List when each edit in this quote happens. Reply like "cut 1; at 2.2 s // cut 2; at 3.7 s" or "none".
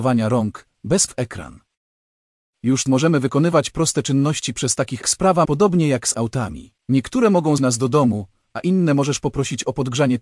cut 1; at 1.1 s // cut 2; at 2.9 s // cut 3; at 5.0 s // cut 4; at 5.4 s // cut 5; at 6.1 s // cut 6; at 6.8 s // cut 7; at 7.6 s

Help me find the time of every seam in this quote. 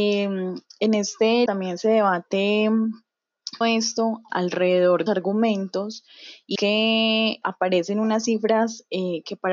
cut 1; at 1.5 s // cut 2; at 3.6 s // cut 3; at 4.3 s // cut 4; at 5.1 s // cut 5; at 6.6 s // cut 6; at 7.4 s

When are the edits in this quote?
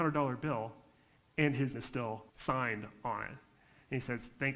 cut 1; at 1.7 s // cut 2; at 2.3 s

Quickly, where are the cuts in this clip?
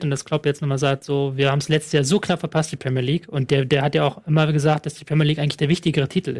none

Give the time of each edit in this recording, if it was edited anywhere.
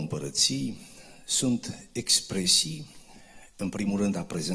none

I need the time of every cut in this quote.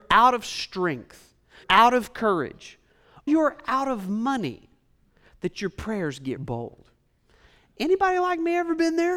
cut 1; at 1.6 s // cut 2; at 3.3 s // cut 3; at 6.4 s

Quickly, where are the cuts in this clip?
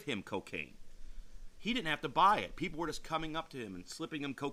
none

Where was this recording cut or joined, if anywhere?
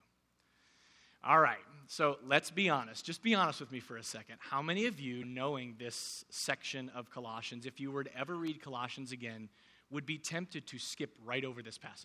cut 1; at 5.2 s

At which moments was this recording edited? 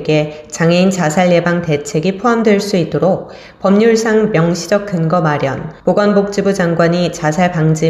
cut 1; at 5.8 s

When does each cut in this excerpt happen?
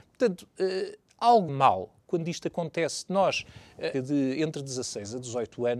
cut 1; at 1.5 s // cut 2; at 3.9 s

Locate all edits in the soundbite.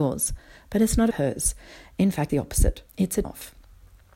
cut 1; at 1.1 s // cut 2; at 2.3 s // cut 3; at 2.9 s // cut 4; at 3.2 s

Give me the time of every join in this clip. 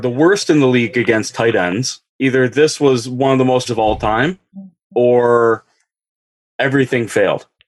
cut 1; at 2.1 s // cut 2; at 3.7 s

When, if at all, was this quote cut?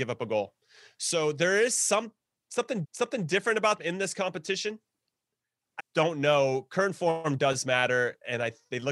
cut 1; at 2.8 s // cut 2; at 3.8 s // cut 3; at 5.8 s

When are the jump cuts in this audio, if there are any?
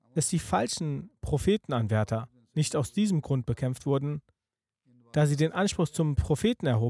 none

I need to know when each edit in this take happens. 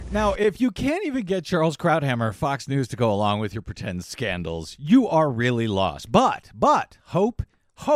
none

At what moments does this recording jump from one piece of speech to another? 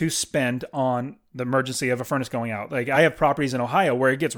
none

